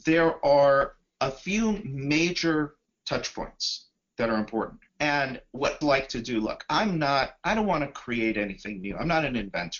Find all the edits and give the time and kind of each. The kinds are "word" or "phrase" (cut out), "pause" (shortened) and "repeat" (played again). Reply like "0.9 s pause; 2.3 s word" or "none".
4.9 s pause; 5.8 s phrase

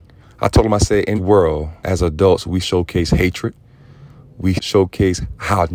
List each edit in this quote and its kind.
1.2 s word; 1.8 s word; 2.6 s word; 4.6 s word

